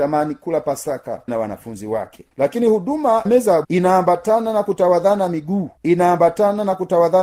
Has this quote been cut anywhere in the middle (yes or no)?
yes